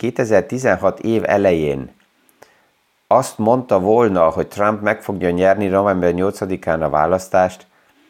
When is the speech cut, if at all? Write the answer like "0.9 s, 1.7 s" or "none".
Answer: none

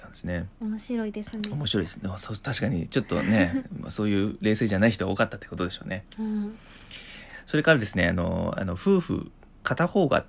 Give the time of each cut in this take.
none

